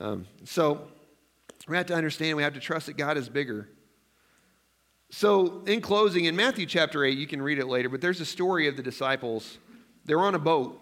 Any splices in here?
no; 0 cuts

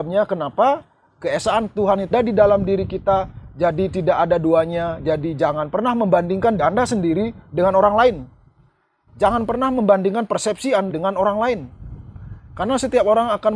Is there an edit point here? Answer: yes; 3 cuts; at 2.1 s, 6.6 s, 10.9 s

